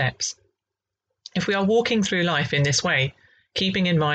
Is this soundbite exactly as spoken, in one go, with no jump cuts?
yes; 0 cuts

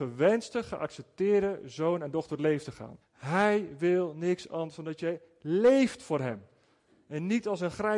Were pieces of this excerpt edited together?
yes; 1 cut; at 3.0 s

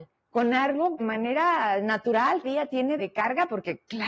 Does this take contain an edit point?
yes; 3 cuts; at 1.0 s, 2.4 s, 3.0 s

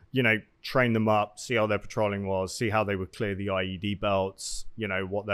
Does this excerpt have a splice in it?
no; 0 cuts

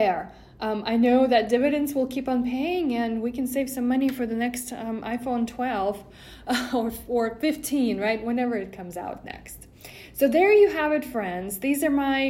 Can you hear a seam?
no; 0 cuts

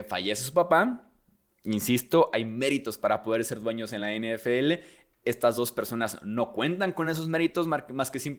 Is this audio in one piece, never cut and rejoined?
yes; 0 cuts

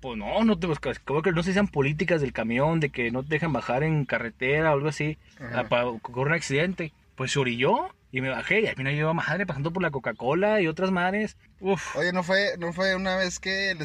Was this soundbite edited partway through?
no; 0 cuts

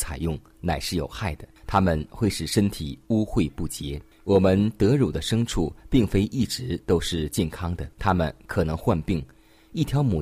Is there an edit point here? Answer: yes; 3 cuts; at 1.6 s, 4.1 s, 7.9 s

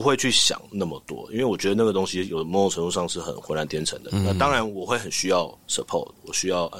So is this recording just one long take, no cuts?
no; 1 cut; at 5.6 s

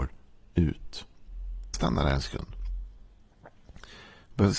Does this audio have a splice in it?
yes; 1 cut; at 1.7 s

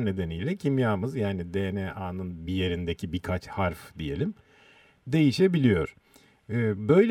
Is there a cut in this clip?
no; 0 cuts

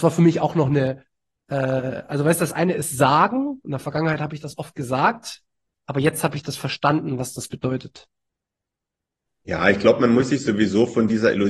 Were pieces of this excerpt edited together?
no; 0 cuts

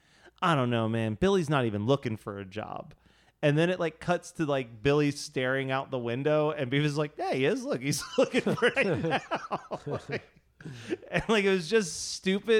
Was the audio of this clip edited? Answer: yes; 1 cut; at 8.7 s

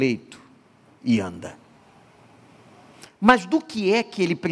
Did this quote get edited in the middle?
no; 0 cuts

